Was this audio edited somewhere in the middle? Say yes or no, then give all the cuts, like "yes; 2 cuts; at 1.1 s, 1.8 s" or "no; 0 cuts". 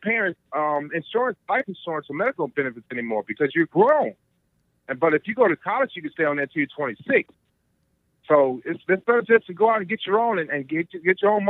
no; 0 cuts